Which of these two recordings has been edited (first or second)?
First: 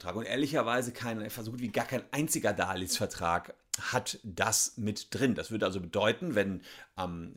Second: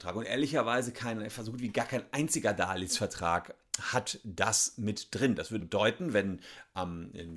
second